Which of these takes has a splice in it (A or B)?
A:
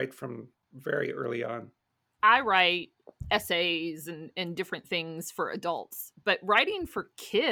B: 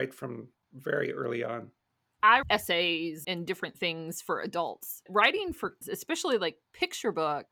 B